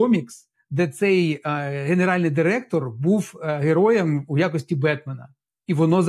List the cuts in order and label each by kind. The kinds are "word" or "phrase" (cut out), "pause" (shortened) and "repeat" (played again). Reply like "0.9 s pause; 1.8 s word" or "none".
none